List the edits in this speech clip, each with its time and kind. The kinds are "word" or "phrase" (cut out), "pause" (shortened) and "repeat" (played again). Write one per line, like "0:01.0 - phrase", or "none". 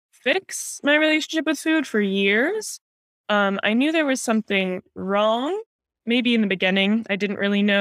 none